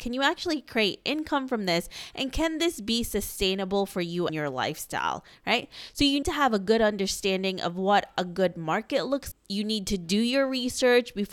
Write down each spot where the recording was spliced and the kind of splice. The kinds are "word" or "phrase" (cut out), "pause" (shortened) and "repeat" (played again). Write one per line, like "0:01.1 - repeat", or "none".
0:04.3 - word
0:06.2 - word
0:09.3 - word